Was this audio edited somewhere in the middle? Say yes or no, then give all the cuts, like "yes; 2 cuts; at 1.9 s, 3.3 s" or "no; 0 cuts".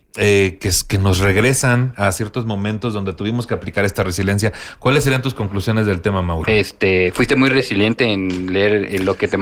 no; 0 cuts